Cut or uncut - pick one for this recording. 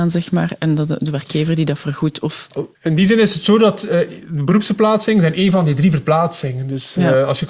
cut